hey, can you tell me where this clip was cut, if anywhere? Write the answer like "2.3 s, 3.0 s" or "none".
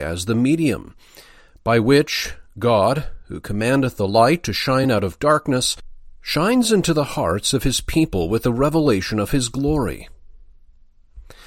none